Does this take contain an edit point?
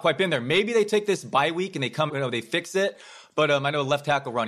yes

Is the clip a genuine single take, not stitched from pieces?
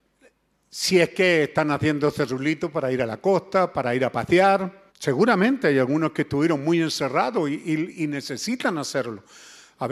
no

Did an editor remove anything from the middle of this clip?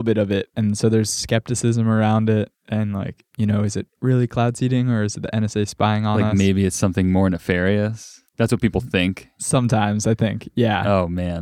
no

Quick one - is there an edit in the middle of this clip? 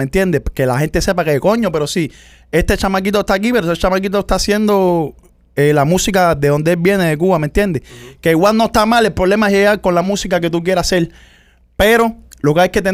no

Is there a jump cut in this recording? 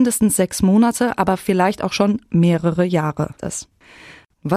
yes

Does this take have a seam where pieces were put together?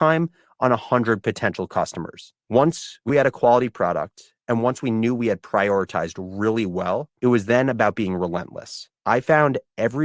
yes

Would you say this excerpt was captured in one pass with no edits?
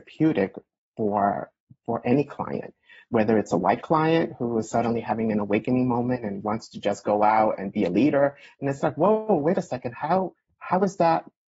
yes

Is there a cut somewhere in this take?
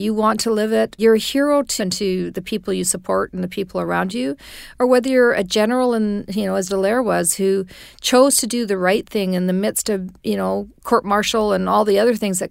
yes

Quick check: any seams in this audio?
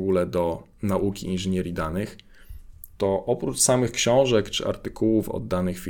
no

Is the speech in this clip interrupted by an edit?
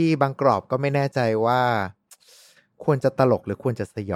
no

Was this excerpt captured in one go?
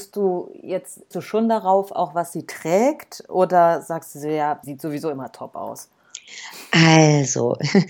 no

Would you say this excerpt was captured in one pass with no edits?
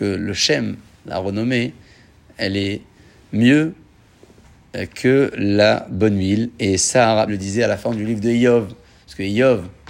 no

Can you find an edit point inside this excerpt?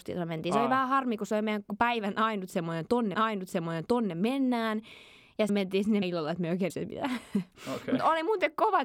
yes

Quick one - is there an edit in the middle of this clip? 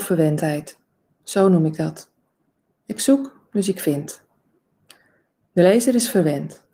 no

